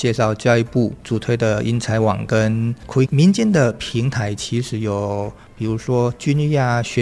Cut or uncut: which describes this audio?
cut